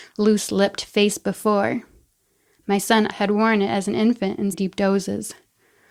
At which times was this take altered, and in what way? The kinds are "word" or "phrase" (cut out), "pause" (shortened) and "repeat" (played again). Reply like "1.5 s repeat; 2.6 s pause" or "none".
3.1 s word; 4.5 s word